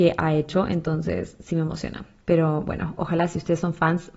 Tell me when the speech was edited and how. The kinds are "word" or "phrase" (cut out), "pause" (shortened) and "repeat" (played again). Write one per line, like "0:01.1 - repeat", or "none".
none